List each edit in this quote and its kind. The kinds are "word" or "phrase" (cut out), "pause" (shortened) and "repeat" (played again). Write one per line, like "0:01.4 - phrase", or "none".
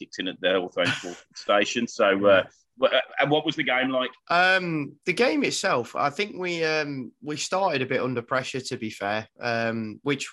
0:04.2 - pause